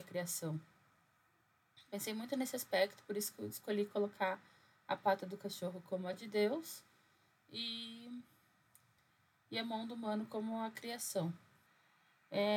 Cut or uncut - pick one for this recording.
uncut